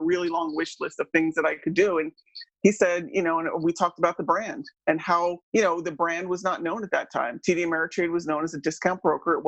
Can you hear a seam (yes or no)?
yes